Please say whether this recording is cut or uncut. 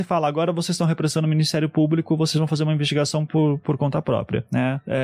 uncut